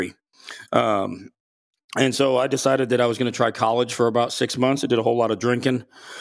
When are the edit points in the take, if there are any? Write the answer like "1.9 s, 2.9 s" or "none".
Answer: none